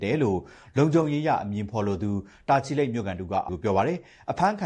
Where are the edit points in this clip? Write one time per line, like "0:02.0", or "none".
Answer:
0:03.5